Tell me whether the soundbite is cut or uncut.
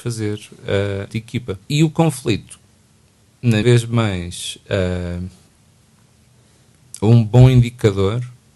cut